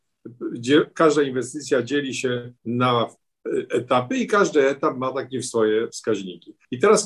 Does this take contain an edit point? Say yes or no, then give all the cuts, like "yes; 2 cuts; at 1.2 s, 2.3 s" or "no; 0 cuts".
yes; 1 cut; at 2.6 s